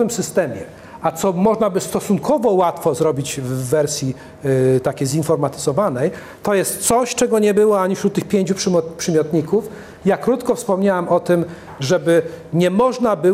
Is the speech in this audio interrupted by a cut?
no; 0 cuts

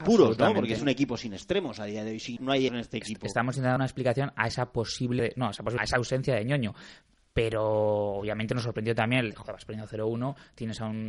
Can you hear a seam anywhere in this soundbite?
yes; 5 cuts; at 2.4 s, 2.7 s, 3.8 s, 5.2 s, 5.8 s

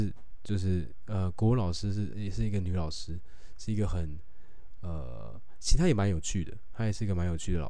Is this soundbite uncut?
no; 1 cut; at 2.1 s

